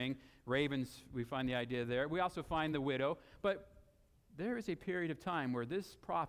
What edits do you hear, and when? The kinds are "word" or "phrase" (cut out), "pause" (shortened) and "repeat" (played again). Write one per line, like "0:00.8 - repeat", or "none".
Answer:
none